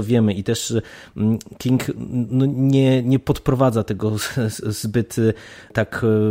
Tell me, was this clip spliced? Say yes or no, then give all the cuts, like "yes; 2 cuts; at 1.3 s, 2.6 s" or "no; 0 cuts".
no; 0 cuts